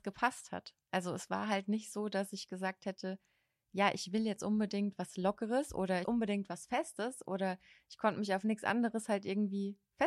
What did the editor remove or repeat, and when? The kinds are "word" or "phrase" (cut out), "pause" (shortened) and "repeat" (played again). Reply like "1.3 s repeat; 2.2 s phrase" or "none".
6.0 s phrase